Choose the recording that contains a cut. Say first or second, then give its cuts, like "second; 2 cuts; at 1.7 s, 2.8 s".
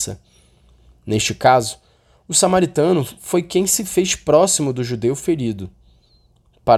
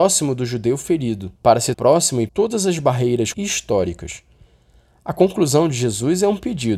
second; 4 cuts; at 1.4 s, 1.7 s, 2.3 s, 3.3 s